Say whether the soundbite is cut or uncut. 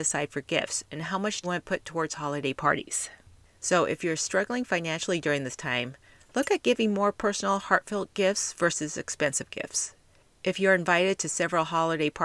cut